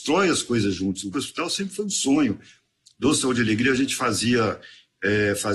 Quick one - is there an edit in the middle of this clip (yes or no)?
yes